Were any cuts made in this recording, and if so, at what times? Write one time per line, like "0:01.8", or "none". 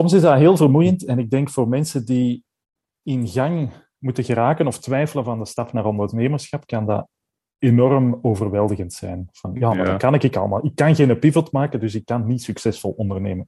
none